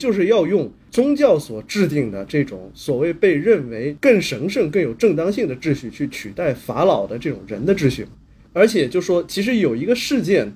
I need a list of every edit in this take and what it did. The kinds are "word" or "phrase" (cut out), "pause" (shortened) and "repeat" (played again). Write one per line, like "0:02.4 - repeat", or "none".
none